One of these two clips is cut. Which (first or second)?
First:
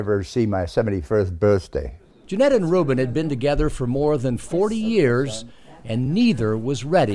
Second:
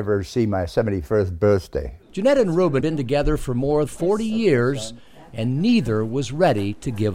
second